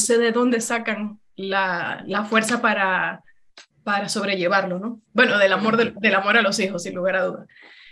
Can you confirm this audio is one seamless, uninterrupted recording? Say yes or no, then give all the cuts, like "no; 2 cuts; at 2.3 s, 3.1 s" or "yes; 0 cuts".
no; 3 cuts; at 1.3 s, 3.7 s, 5.0 s